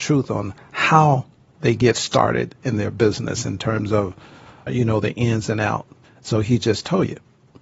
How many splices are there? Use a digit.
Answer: 1